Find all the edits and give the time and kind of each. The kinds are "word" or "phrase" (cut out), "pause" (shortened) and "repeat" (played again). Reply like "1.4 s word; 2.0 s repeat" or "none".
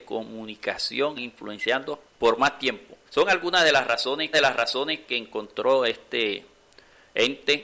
1.2 s word; 2.1 s pause; 3.1 s pause; 4.3 s repeat